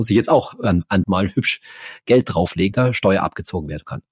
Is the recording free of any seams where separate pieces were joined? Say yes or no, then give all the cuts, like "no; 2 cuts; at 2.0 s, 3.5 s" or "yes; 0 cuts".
no; 2 cuts; at 1.0 s, 2.7 s